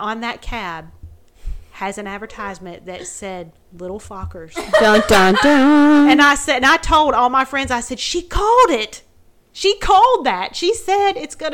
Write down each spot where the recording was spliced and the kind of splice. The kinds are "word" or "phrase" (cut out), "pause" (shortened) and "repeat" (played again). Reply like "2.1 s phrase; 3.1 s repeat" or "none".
none